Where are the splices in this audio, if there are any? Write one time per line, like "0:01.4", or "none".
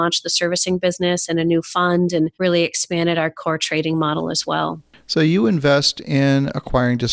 0:02.3